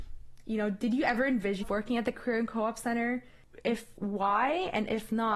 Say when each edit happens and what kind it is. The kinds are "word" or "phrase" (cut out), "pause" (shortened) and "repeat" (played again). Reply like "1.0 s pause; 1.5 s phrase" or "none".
1.6 s word; 4.0 s word